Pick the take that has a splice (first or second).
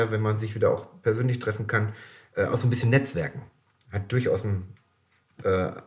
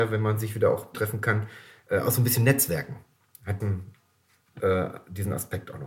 second